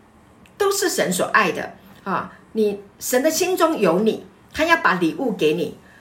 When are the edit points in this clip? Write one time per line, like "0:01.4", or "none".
none